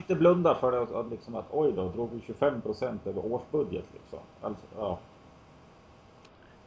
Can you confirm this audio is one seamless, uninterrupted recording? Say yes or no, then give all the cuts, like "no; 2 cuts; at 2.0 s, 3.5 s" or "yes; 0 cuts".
yes; 0 cuts